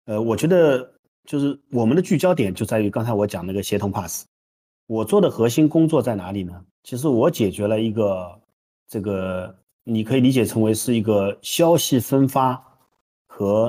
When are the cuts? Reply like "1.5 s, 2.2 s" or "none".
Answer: 6.7 s

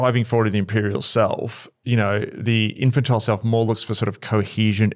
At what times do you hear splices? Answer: none

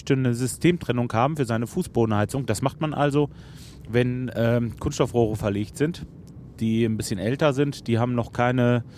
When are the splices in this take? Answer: none

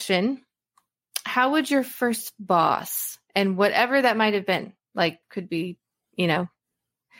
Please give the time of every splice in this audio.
5.2 s

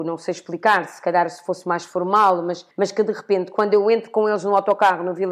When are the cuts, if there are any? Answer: 2.7 s

